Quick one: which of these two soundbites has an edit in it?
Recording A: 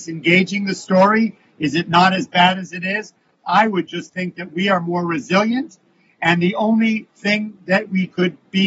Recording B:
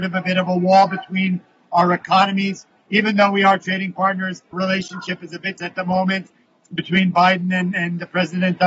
B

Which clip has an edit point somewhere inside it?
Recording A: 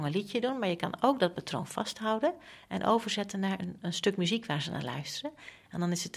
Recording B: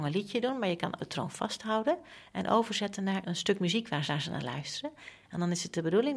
B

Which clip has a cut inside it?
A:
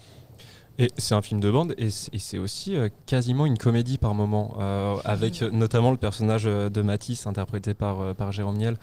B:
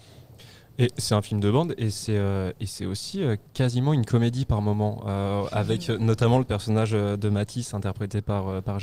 A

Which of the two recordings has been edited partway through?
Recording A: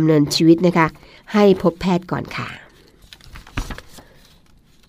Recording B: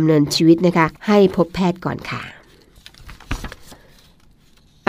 B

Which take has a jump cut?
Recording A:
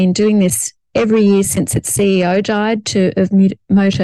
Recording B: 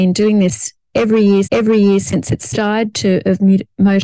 B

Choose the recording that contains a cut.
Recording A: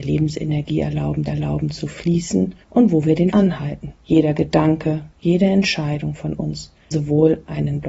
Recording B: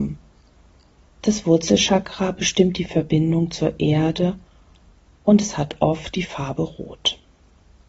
A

